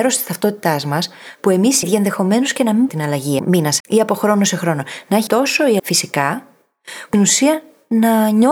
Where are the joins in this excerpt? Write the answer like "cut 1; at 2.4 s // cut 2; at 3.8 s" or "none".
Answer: cut 1; at 1.8 s // cut 2; at 2.9 s // cut 3; at 3.4 s // cut 4; at 3.8 s // cut 5; at 5.3 s // cut 6; at 5.8 s // cut 7; at 7.1 s